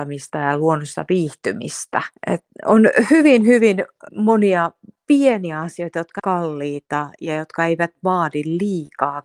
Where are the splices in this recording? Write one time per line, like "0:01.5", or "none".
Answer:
0:02.2
0:04.1
0:06.2